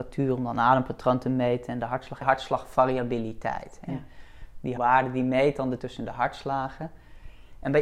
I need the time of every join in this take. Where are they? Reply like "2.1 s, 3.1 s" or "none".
2.2 s, 4.8 s, 5.8 s